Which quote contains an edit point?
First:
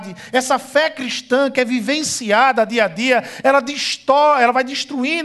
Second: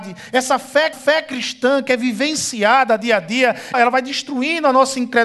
second; 2 cuts; at 0.9 s, 3.7 s

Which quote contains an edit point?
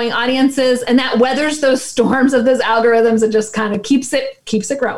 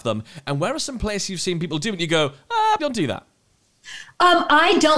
second; 1 cut; at 2.8 s

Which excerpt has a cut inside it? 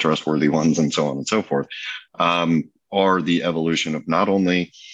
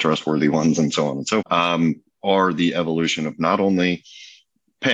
second; 1 cut; at 1.4 s

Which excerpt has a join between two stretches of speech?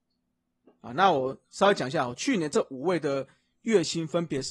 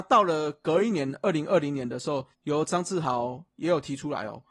second; 2 cuts; at 2.3 s, 3.5 s

